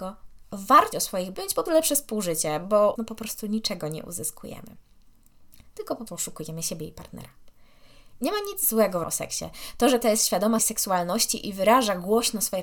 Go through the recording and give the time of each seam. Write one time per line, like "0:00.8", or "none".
0:00.9
0:01.3
0:01.7
0:03.0
0:06.1
0:09.0
0:10.0
0:10.6